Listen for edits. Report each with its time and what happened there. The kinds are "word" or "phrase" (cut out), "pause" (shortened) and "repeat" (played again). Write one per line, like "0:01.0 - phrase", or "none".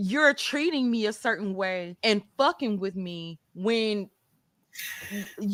0:02.0 - pause
0:03.4 - pause